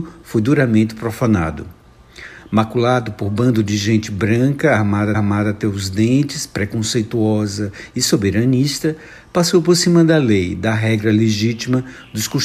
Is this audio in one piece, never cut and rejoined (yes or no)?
no